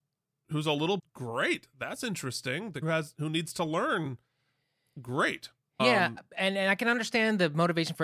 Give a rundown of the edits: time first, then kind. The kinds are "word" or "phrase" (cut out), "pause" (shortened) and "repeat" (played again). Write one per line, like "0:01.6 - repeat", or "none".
0:01.0 - word
0:02.8 - word
0:05.8 - word